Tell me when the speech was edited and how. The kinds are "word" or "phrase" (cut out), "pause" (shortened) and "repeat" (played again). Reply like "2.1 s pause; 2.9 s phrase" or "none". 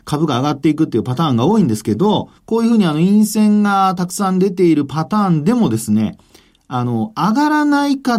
2.4 s pause